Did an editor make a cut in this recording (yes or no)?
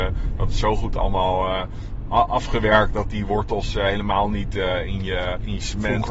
no